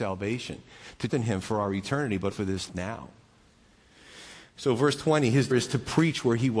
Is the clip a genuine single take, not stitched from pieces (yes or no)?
no